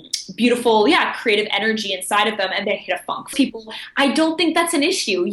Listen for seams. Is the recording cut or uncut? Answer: cut